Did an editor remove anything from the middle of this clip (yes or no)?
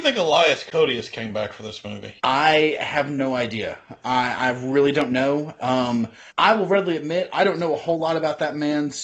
yes